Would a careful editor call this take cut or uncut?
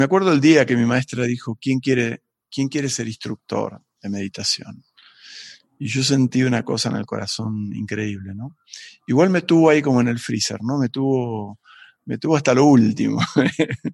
uncut